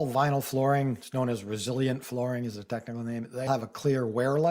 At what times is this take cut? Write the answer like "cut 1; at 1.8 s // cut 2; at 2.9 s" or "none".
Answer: cut 1; at 3.5 s